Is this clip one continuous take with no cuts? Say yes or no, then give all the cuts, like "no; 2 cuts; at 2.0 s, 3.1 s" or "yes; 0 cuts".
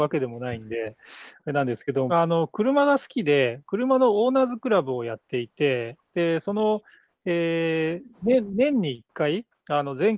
no; 2 cuts; at 2.1 s, 8.1 s